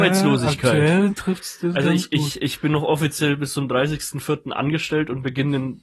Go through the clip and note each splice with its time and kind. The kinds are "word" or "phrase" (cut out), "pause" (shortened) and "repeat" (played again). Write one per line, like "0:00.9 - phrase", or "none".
none